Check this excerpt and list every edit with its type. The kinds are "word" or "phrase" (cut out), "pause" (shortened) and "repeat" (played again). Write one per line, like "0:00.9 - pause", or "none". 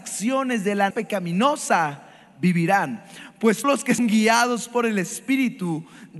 0:00.9 - word
0:03.6 - word
0:04.0 - word